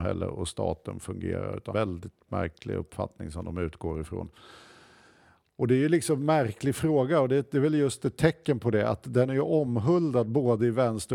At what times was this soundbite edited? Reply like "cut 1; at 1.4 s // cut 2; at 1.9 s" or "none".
cut 1; at 1.7 s